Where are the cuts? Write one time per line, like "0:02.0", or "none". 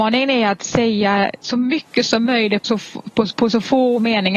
0:01.4
0:02.6
0:03.3